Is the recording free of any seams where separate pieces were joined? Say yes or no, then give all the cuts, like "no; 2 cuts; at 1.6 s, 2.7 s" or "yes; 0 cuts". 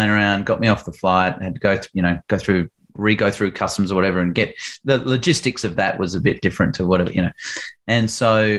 yes; 0 cuts